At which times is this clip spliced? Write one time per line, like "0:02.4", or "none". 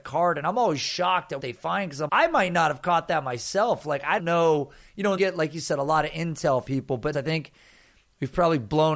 0:01.4
0:02.1
0:04.2
0:05.2
0:06.7
0:07.1